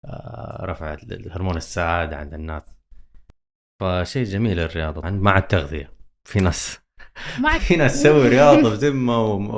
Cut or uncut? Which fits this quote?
cut